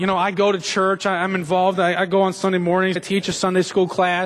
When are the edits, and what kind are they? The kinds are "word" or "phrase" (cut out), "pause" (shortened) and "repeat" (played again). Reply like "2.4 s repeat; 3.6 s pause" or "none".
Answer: 3.0 s word